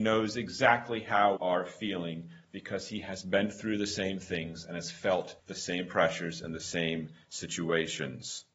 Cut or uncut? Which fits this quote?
cut